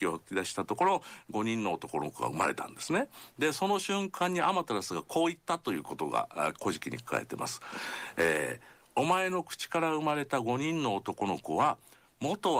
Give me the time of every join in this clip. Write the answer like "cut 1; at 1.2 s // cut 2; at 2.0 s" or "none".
none